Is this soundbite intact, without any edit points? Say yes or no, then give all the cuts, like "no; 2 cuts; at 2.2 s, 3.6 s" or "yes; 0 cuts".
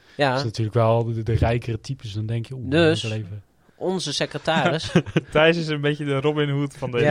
yes; 0 cuts